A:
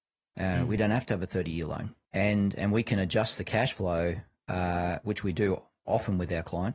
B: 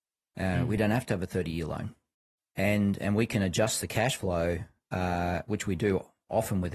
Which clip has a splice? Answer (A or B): A